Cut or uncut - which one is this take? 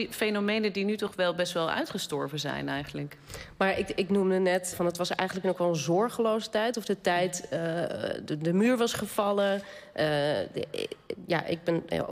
cut